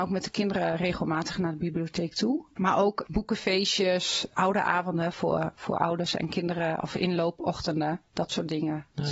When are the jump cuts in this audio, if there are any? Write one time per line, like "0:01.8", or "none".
none